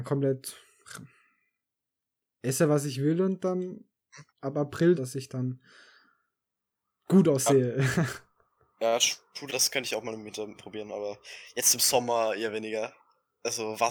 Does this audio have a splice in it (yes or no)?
yes